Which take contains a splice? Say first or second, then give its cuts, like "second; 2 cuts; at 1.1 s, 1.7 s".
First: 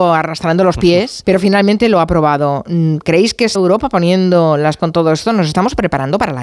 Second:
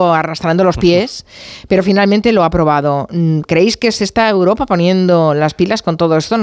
first; 3 cuts; at 1.2 s, 3.5 s, 4.8 s